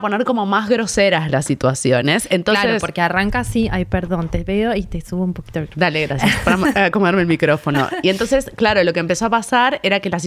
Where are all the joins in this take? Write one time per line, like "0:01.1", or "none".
none